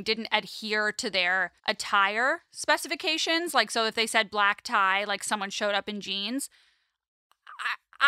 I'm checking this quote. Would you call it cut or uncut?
cut